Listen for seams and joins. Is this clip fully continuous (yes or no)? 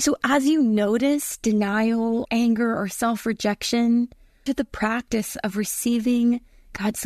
no